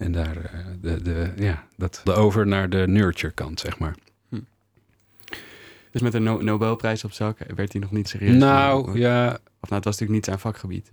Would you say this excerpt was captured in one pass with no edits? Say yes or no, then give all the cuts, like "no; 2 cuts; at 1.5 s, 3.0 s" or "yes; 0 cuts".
no; 4 cuts; at 1.0 s, 2.1 s, 6.0 s, 8.1 s